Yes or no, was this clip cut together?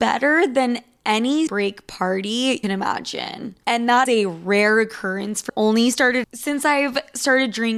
yes